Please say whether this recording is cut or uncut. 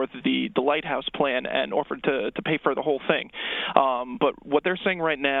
uncut